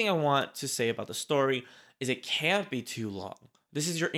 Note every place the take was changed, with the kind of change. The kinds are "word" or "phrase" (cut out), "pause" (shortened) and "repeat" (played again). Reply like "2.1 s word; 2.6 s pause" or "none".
none